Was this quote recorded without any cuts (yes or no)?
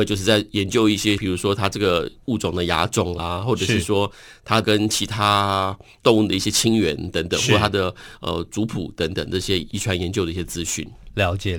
yes